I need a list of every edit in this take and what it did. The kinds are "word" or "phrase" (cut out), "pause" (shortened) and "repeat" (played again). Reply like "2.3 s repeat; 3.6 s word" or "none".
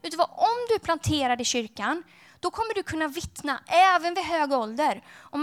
none